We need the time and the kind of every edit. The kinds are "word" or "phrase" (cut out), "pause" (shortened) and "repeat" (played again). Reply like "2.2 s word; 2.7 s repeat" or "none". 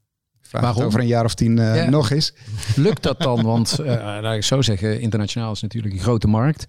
none